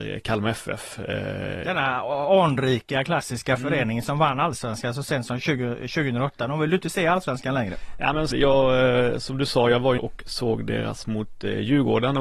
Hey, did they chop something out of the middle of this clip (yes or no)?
yes